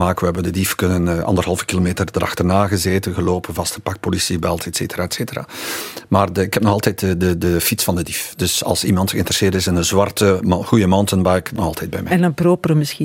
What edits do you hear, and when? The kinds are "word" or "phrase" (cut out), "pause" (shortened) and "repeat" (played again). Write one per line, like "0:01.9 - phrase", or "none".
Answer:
0:11.6 - word